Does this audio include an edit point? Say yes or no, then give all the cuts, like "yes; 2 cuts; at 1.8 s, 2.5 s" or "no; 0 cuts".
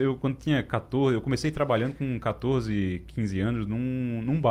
no; 0 cuts